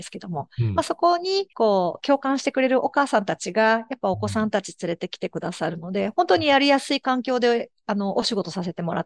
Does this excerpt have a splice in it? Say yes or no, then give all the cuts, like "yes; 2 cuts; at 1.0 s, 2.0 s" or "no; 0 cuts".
yes; 1 cut; at 1.5 s